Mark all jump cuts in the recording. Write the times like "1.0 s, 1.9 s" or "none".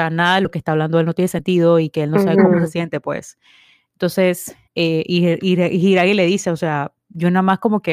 4.7 s